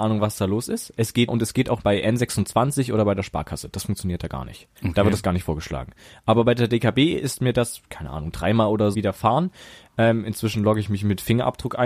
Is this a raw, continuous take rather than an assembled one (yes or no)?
no